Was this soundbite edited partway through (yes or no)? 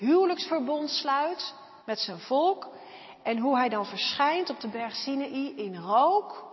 yes